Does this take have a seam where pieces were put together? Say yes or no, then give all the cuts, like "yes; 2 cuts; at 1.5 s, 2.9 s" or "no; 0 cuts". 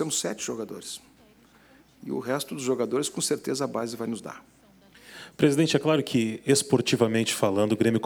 no; 0 cuts